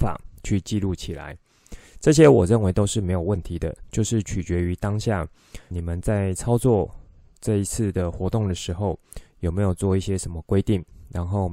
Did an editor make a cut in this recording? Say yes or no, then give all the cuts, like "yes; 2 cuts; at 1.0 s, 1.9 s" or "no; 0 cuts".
yes; 1 cut; at 5.7 s